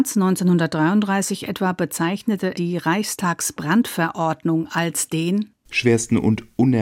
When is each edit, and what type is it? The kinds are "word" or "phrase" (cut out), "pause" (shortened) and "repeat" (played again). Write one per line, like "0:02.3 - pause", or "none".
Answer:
0:02.5 - word